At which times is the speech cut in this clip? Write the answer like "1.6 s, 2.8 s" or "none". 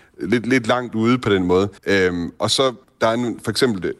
1.8 s